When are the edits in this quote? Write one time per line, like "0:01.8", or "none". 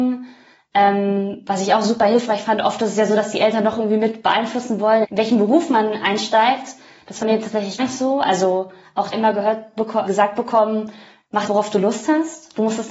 0:05.0
0:07.2
0:07.8
0:09.1
0:10.1
0:11.5